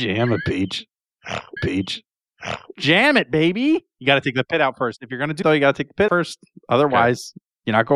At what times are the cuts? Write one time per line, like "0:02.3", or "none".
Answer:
0:01.6
0:05.4
0:06.1

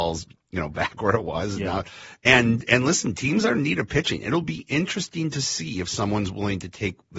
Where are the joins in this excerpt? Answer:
none

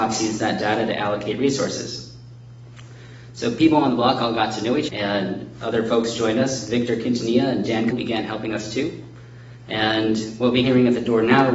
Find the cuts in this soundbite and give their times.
0:04.9
0:07.9
0:10.6

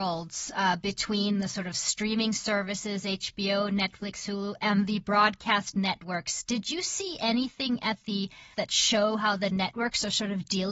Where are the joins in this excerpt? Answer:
0:08.5

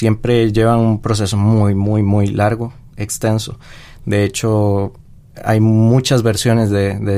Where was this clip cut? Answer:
none

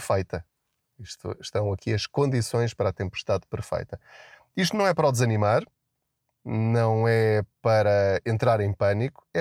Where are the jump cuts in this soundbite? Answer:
none

